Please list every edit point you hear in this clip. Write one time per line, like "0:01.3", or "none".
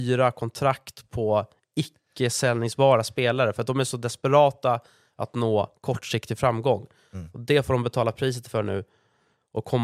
none